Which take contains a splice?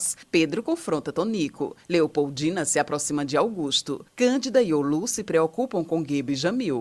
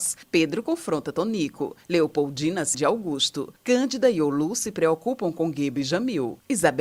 second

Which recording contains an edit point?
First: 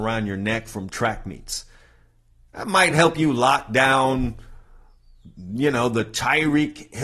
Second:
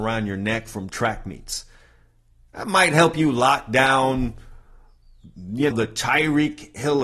second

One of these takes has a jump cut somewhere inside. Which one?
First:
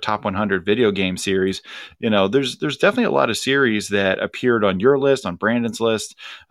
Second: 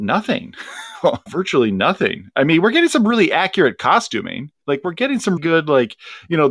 second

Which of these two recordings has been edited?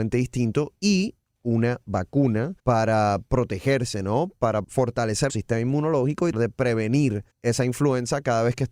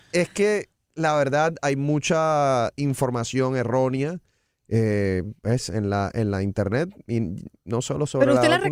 first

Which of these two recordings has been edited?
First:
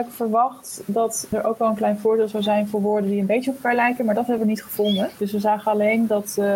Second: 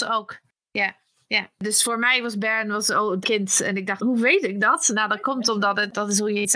second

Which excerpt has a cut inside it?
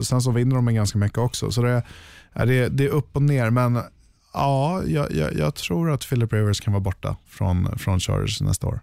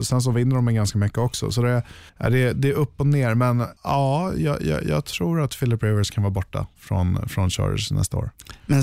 second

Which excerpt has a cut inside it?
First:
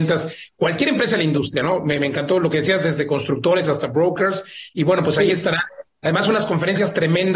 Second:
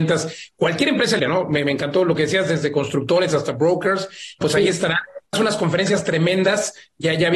second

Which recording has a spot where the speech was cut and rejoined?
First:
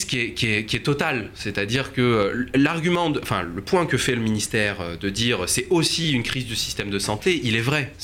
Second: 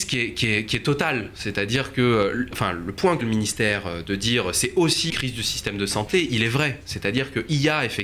second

